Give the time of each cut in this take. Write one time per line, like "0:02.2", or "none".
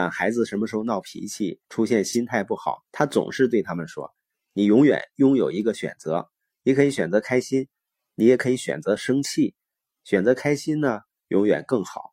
0:01.6
0:02.9